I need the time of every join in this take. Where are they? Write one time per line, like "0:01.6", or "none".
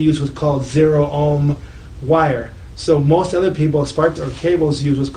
0:04.2